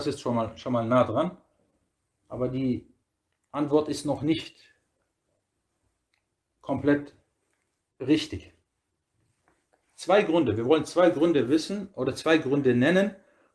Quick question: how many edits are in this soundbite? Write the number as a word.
zero